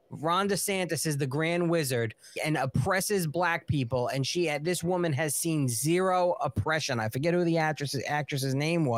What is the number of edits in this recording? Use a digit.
1